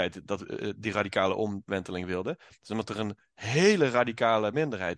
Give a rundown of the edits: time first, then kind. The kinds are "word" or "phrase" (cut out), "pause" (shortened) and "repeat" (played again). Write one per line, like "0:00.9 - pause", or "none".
none